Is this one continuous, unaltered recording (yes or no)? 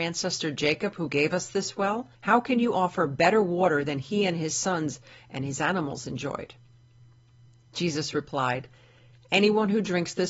no